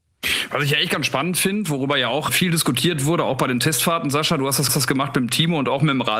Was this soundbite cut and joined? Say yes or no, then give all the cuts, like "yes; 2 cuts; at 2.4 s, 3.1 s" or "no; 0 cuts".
yes; 2 cuts; at 2.3 s, 4.7 s